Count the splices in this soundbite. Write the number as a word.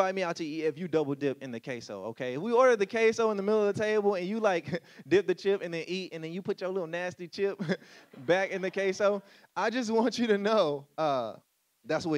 zero